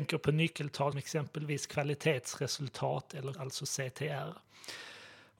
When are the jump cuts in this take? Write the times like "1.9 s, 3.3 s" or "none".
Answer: 0.9 s, 3.3 s